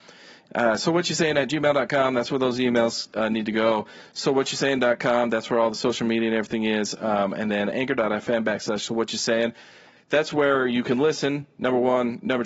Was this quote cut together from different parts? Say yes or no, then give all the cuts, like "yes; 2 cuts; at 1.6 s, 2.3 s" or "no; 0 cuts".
no; 0 cuts